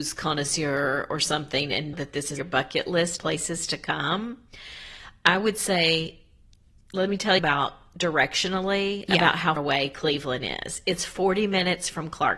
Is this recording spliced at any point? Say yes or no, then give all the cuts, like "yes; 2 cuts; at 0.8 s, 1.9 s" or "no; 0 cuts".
yes; 5 cuts; at 1.9 s, 2.4 s, 3.2 s, 7.4 s, 9.6 s